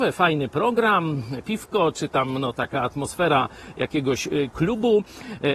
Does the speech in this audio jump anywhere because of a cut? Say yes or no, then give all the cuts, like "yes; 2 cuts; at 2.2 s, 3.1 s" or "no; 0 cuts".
no; 0 cuts